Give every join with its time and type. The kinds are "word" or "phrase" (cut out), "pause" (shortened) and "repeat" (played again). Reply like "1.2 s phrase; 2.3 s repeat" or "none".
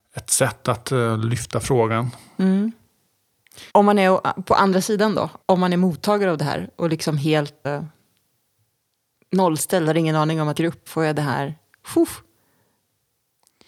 3.7 s pause; 5.4 s pause; 7.6 s word; 10.6 s phrase; 10.9 s phrase